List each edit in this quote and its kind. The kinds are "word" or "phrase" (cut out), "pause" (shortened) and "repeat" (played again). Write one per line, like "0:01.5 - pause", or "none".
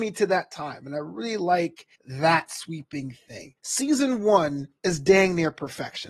0:01.9 - pause
0:03.6 - pause
0:04.8 - pause

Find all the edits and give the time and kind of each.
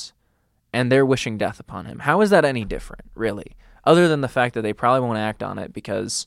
none

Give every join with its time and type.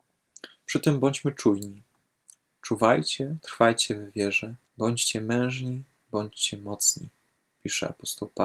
0:04.6 - pause

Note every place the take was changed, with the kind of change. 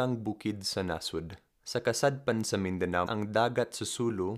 0:01.5 - pause
0:03.1 - word

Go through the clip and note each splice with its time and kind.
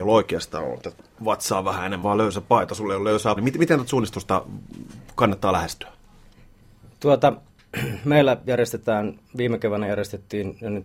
0:02.0 - phrase
0:03.4 - word
0:09.3 - pause

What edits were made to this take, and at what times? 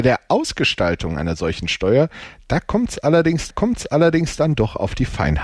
0:03.5 - repeat

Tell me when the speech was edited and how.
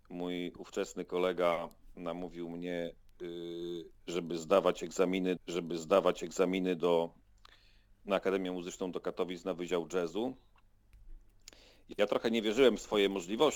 0:05.4 - repeat

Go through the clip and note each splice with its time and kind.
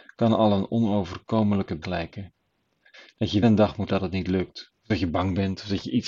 0:01.8 - word
0:02.6 - pause
0:03.4 - word
0:03.9 - word
0:04.8 - pause

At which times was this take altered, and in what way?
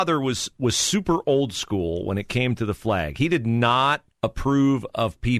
0:04.1 - pause

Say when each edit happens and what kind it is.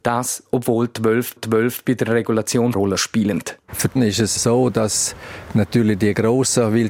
0:01.4 - repeat
0:02.7 - phrase
0:04.0 - word
0:04.4 - word

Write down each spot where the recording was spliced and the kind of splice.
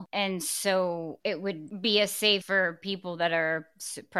0:02.4 - word

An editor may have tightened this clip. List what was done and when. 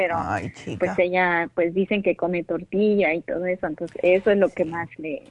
none

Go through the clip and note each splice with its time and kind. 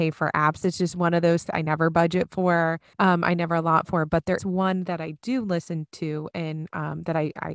0:01.5 - word
0:02.9 - pause
0:04.4 - word

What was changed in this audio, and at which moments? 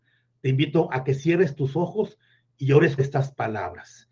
0:03.0 - word

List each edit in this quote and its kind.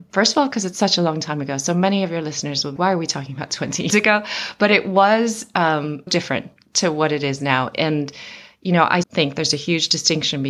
0:02.8 - word
0:03.9 - word
0:06.1 - word
0:09.0 - word

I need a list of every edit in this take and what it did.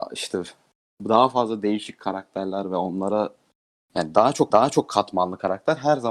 0:04.5 - repeat

